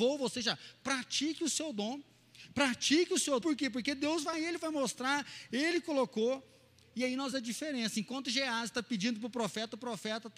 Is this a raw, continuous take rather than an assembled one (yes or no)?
no